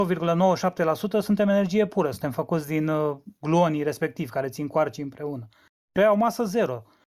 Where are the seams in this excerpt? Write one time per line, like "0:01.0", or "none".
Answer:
none